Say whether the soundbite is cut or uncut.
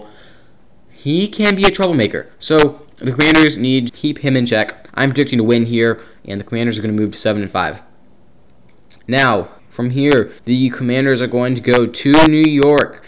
cut